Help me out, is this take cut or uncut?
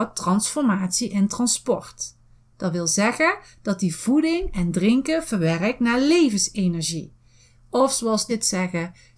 cut